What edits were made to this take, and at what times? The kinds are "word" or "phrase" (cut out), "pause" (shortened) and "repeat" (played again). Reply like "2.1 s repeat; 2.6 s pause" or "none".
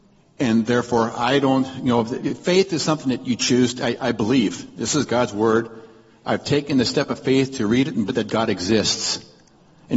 4.0 s word; 8.1 s word